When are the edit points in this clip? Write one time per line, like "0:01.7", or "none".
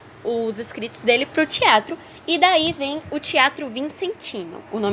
none